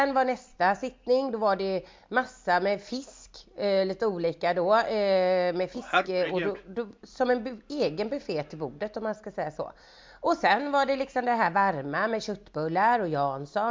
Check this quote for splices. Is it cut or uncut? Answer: uncut